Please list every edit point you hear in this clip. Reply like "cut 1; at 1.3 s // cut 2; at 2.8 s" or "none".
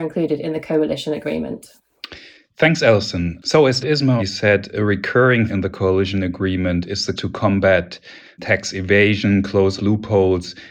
cut 1; at 3.8 s // cut 2; at 4.2 s // cut 3; at 5.5 s // cut 4; at 7.2 s // cut 5; at 9.8 s

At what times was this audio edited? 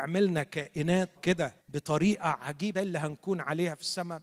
cut 1; at 1.2 s // cut 2; at 1.6 s // cut 3; at 2.7 s

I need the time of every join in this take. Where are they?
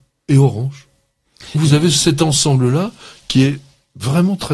cut 1; at 1.5 s

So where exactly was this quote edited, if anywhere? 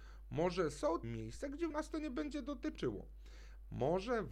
cut 1; at 1.0 s // cut 2; at 1.7 s

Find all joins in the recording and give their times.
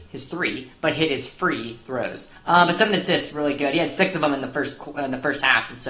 cut 1; at 2.3 s

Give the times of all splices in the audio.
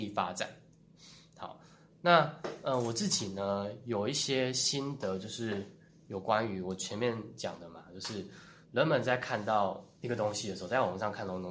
cut 1; at 8.6 s // cut 2; at 9.9 s

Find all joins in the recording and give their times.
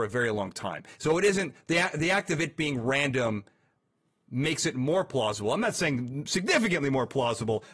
none

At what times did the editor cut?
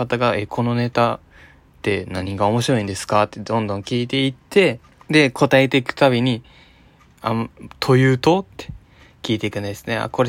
cut 1; at 4.9 s

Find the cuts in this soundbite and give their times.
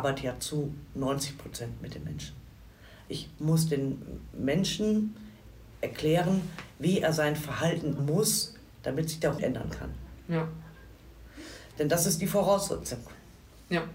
cut 1; at 8.0 s // cut 2; at 9.4 s

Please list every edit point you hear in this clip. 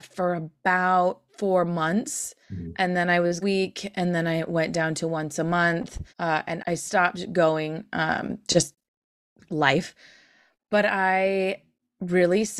cut 1; at 1.3 s // cut 2; at 2.4 s // cut 3; at 3.4 s // cut 4; at 6.1 s // cut 5; at 6.6 s // cut 6; at 9.2 s

